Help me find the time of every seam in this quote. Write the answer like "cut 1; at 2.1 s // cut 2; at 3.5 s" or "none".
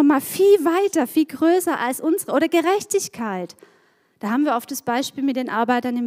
none

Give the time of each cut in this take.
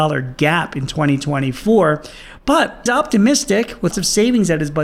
cut 1; at 2.9 s // cut 2; at 3.9 s

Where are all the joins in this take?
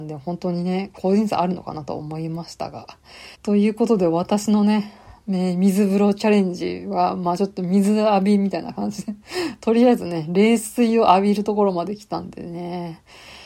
cut 1; at 3.3 s // cut 2; at 9.2 s

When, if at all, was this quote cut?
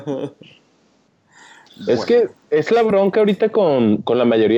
none

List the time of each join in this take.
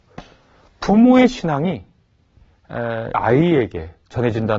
cut 1; at 3.1 s

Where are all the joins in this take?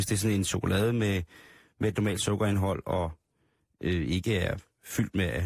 none

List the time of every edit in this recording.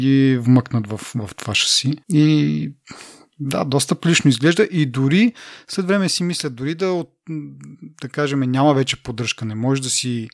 cut 1; at 2.0 s

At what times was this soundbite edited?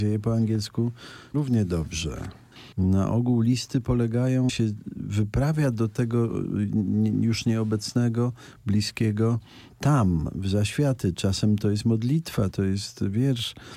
cut 1; at 1.3 s // cut 2; at 2.7 s // cut 3; at 4.5 s // cut 4; at 12.5 s

